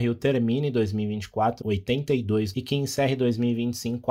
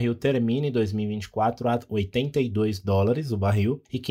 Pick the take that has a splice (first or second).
first